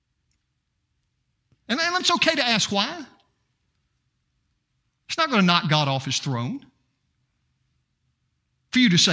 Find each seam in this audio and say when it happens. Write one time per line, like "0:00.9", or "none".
0:02.0